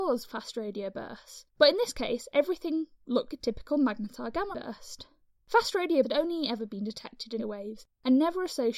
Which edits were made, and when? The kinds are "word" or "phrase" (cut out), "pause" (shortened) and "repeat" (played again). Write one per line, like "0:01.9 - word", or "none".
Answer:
0:01.5 - pause
0:03.3 - word
0:04.5 - word
0:06.0 - word
0:07.4 - word